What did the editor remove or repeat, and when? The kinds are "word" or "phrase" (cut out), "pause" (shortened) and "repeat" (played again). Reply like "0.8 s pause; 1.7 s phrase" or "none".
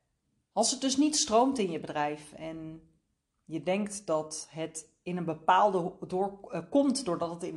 none

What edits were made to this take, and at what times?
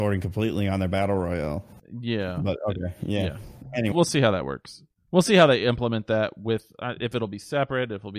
3.9 s word

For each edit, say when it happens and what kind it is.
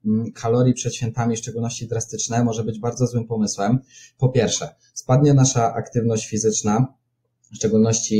none

